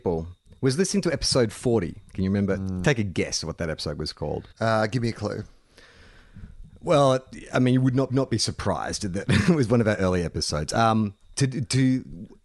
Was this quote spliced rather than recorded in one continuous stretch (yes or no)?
yes